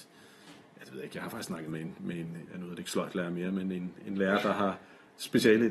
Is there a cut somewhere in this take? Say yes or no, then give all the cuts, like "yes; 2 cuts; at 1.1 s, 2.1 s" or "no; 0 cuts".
yes; 1 cut; at 2.5 s